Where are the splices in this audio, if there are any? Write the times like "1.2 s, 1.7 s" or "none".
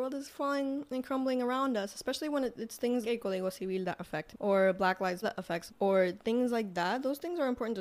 3.0 s, 4.3 s, 5.2 s, 5.7 s